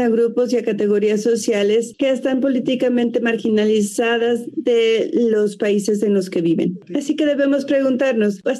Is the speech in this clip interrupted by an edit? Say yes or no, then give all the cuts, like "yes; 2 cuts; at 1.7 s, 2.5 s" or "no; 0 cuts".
no; 0 cuts